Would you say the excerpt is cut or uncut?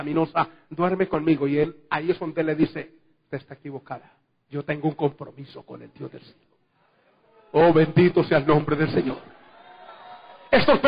uncut